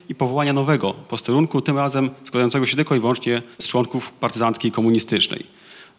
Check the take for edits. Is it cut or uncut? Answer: cut